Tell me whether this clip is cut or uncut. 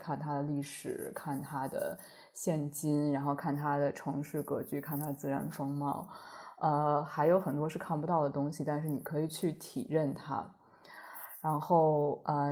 uncut